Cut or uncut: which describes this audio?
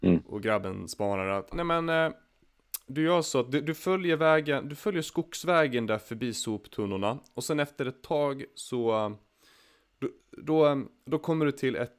cut